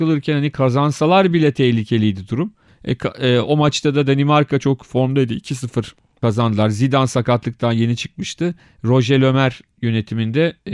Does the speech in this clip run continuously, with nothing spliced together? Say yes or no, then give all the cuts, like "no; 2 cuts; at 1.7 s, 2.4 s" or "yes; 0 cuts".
yes; 0 cuts